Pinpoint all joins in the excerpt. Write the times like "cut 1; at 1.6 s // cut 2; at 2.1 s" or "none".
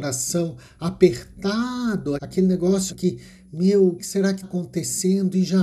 cut 1; at 2.2 s // cut 2; at 2.9 s // cut 3; at 4.0 s // cut 4; at 4.4 s